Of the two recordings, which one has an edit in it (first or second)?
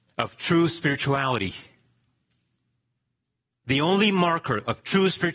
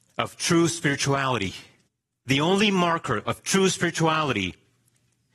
second